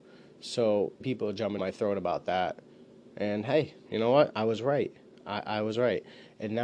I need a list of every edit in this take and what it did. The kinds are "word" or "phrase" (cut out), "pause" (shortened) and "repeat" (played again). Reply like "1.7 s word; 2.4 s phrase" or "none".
1.0 s phrase; 1.6 s word

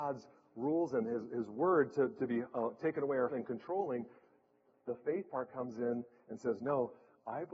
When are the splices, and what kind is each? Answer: 3.3 s word

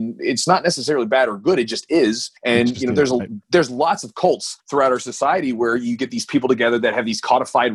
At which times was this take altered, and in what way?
2.4 s pause; 4.6 s pause

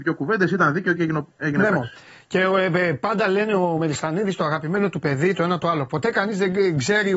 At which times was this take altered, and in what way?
none

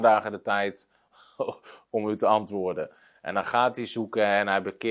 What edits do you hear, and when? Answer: none

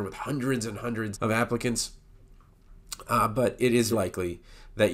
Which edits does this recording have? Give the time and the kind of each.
1.1 s word; 3.9 s word

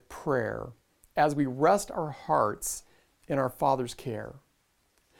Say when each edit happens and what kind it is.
none

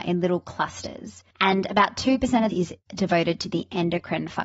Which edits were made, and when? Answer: 1.3 s pause; 2.5 s phrase; 2.8 s pause

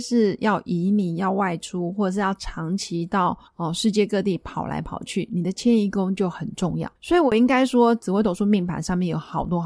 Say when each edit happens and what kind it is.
3.5 s pause; 7.0 s pause

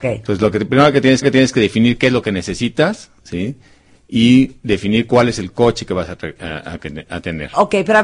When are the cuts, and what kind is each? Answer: 1.2 s repeat; 3.2 s pause

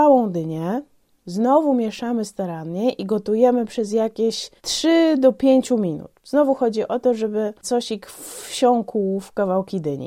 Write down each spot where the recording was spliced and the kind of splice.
4.6 s pause; 6.2 s pause; 7.6 s word

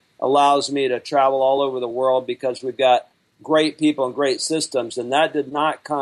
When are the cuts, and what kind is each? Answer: none

